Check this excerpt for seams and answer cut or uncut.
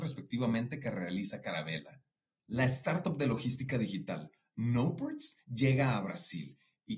uncut